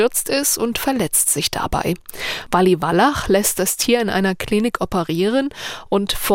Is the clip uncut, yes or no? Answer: yes